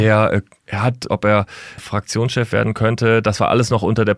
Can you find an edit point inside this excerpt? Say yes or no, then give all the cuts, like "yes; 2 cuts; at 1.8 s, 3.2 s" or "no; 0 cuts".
yes; 2 cuts; at 1.1 s, 1.8 s